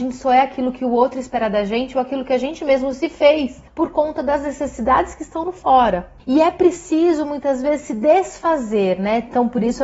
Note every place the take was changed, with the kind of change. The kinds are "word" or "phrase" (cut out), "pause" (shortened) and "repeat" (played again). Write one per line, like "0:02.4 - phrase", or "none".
0:03.7 - pause
0:06.2 - pause